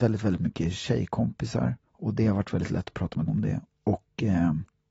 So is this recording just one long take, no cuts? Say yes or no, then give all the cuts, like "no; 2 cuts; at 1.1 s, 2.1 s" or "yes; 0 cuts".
no; 2 cuts; at 1.9 s, 3.3 s